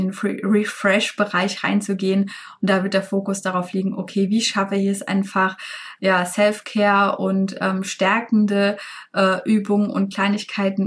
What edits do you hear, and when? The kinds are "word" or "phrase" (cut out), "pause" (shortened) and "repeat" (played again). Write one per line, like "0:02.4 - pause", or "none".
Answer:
0:06.0 - word